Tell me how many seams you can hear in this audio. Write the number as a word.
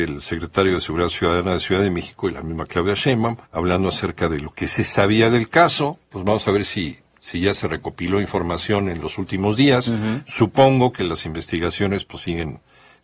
two